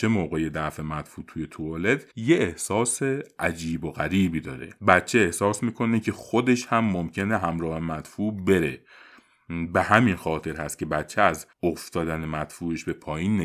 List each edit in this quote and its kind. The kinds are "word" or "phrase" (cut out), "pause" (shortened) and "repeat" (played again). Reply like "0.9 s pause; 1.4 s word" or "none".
2.1 s pause; 4.8 s pause; 11.5 s pause